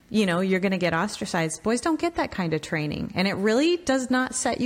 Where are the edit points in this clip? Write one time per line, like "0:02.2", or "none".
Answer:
none